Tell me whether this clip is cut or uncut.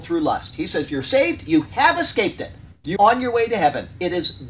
cut